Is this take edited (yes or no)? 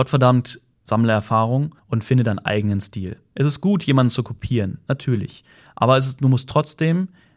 yes